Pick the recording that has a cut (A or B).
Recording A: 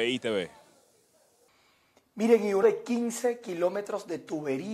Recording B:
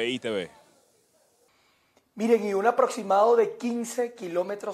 A